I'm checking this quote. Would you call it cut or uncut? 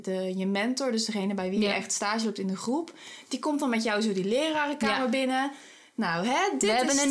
uncut